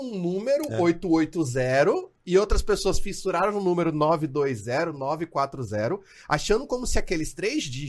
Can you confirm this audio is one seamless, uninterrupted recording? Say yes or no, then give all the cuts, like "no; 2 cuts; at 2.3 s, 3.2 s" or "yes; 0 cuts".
yes; 0 cuts